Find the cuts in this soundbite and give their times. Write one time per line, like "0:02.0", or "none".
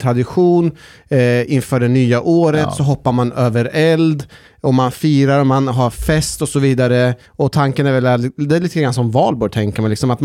0:07.2